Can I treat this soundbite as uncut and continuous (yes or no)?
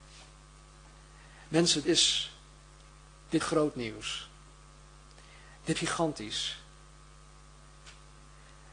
no